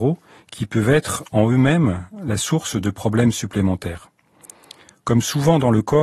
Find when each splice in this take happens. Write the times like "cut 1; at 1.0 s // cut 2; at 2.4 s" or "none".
none